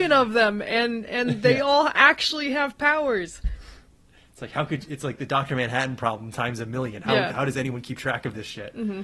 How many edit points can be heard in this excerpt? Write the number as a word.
zero